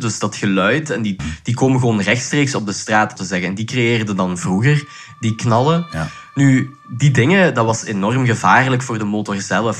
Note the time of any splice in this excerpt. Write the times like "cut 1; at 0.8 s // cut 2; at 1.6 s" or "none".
cut 1; at 1.2 s // cut 2; at 3.2 s